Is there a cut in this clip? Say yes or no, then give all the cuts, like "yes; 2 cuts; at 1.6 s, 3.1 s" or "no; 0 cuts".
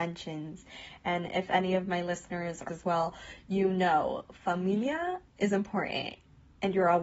yes; 1 cut; at 2.7 s